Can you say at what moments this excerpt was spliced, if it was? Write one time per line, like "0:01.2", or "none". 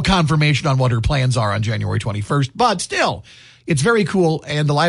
none